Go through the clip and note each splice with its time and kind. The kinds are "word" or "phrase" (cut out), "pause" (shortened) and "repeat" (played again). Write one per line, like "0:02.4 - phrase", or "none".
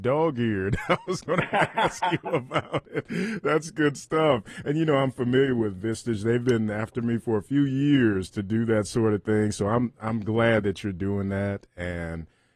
none